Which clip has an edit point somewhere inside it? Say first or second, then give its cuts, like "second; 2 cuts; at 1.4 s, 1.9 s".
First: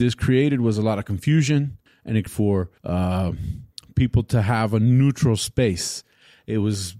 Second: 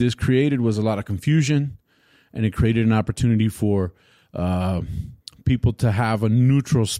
first; 3 cuts; at 1.9 s, 2.3 s, 2.8 s